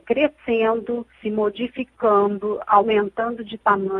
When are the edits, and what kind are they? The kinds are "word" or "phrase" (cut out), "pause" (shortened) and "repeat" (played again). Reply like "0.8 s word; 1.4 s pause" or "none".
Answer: 1.1 s pause